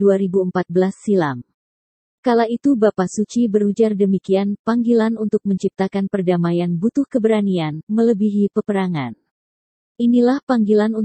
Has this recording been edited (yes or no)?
no